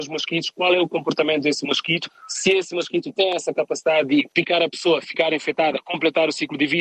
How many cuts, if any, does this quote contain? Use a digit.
1